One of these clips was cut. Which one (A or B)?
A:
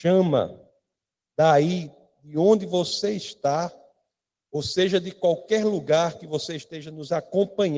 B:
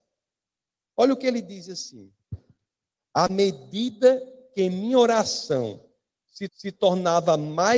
B